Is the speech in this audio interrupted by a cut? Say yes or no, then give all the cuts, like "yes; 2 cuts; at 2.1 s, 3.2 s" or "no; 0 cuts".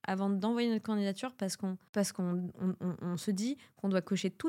no; 0 cuts